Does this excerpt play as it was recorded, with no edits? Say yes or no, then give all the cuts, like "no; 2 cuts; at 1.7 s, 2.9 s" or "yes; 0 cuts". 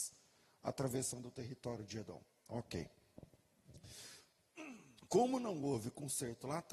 no; 1 cut; at 5.0 s